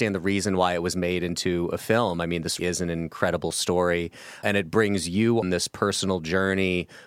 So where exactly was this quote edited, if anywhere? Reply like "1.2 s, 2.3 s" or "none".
2.6 s, 4.4 s, 5.4 s